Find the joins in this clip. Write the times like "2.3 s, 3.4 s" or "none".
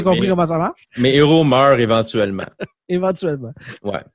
none